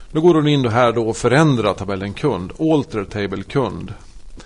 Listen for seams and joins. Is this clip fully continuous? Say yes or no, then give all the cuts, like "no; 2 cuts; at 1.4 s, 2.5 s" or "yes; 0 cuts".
yes; 0 cuts